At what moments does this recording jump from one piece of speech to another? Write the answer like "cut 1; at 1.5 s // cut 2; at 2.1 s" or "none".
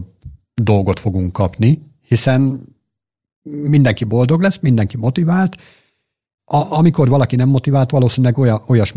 cut 1; at 6.4 s // cut 2; at 7.9 s